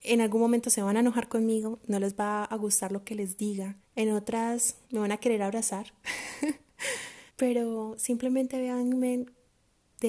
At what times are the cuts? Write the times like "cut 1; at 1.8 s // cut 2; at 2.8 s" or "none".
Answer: cut 1; at 3.8 s // cut 2; at 4.8 s // cut 3; at 7.3 s